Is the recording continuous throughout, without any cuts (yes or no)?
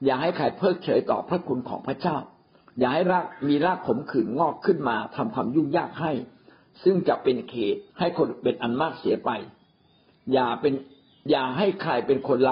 no